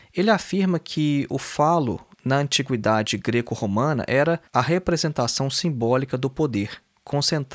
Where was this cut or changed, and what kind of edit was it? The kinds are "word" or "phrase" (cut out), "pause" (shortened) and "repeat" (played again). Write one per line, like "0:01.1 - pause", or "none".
0:04.5 - pause